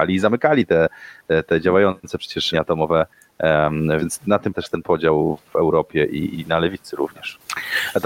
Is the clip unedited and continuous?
no; 4 cuts; at 2.5 s, 4.0 s, 4.5 s, 6.3 s

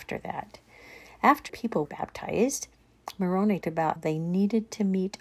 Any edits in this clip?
yes; 4 cuts; at 1.5 s, 1.9 s, 3.6 s, 4.0 s

